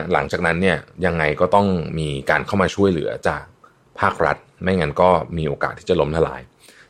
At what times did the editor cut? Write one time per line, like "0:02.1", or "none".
none